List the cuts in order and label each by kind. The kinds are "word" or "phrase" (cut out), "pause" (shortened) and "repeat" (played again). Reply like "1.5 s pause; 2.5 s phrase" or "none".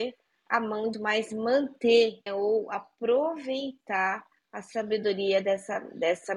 0.9 s phrase; 2.3 s word